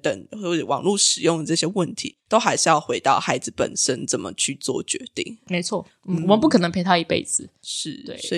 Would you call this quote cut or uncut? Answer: uncut